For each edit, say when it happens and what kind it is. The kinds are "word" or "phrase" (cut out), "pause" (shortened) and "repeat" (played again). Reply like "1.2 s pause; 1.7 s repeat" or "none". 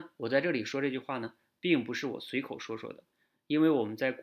none